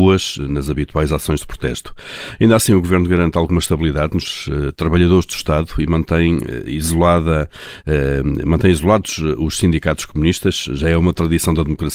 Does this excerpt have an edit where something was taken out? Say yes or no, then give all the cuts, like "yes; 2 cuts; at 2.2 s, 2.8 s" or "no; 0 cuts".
no; 0 cuts